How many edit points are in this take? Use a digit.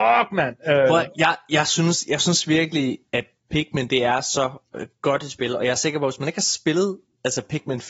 0